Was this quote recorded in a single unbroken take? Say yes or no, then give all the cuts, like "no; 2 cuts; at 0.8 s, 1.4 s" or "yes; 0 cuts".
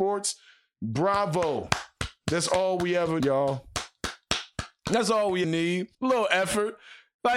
no; 3 cuts; at 3.2 s, 5.4 s, 5.9 s